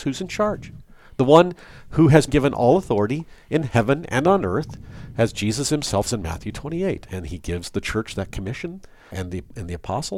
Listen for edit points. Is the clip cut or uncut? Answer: cut